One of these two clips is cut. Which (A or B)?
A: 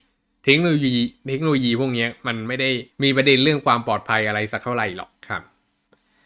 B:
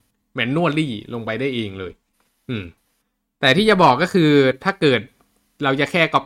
A